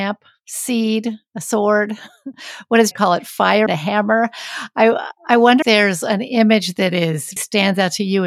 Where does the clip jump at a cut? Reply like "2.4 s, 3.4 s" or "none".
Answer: 2.9 s, 3.7 s, 5.6 s, 7.4 s